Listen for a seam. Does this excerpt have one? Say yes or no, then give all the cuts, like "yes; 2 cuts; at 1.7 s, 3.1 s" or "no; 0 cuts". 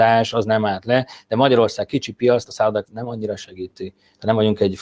yes; 2 cuts; at 2.5 s, 2.8 s